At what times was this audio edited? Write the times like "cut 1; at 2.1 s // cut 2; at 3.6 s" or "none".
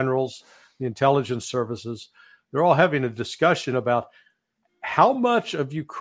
none